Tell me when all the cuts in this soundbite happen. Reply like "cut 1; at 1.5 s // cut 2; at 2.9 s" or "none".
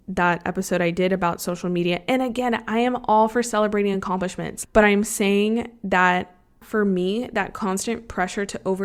none